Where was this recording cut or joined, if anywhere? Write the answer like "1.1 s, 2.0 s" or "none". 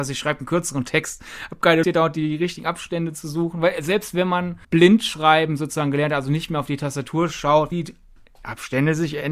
1.8 s, 4.6 s, 7.7 s